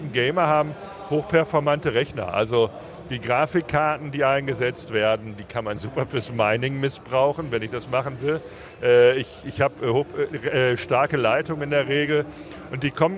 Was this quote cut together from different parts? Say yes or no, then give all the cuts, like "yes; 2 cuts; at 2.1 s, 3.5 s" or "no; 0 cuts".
no; 0 cuts